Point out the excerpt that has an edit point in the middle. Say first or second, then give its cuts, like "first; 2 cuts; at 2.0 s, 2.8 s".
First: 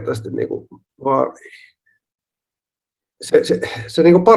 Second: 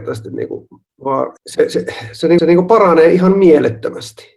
second; 2 cuts; at 1.4 s, 2.4 s